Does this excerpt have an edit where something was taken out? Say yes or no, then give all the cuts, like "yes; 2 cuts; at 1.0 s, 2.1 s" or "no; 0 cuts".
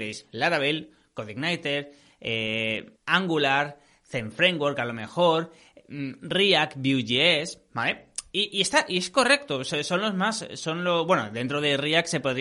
yes; 1 cut; at 3.0 s